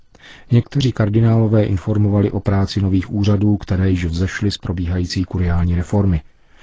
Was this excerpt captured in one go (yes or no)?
yes